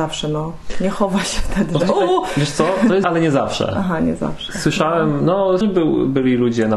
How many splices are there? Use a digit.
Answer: 2